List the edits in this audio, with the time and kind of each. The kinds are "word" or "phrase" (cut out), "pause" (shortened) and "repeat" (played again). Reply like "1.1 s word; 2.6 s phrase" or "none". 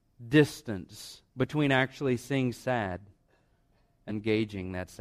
1.3 s pause; 2.5 s word; 4.1 s word